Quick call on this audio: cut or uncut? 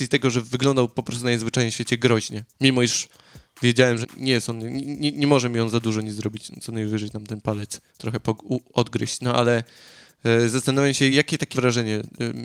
cut